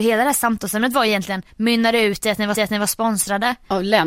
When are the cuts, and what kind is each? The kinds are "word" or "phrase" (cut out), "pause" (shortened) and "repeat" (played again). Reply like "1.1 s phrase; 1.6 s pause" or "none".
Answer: 2.5 s repeat